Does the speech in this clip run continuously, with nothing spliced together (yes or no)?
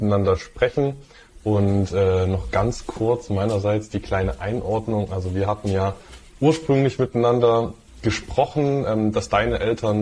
yes